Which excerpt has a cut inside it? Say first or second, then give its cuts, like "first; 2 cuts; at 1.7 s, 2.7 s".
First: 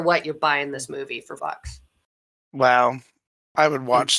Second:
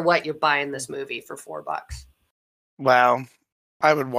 first; 1 cut; at 1.4 s